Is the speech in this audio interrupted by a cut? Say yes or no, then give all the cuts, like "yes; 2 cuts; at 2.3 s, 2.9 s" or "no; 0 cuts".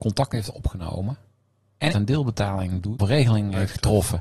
yes; 2 cuts; at 1.9 s, 3.0 s